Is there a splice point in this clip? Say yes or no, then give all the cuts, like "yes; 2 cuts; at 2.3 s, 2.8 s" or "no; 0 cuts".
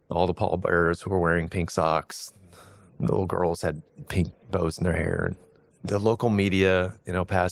yes; 1 cut; at 4.4 s